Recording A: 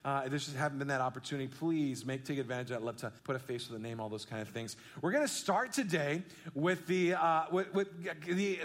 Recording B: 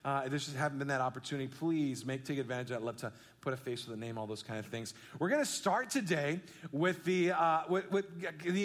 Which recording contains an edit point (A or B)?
A